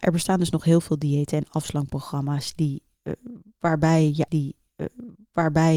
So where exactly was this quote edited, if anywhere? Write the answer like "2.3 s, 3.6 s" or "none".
4.3 s